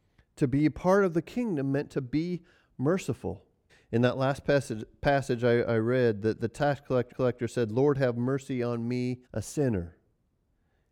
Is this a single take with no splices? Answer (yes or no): no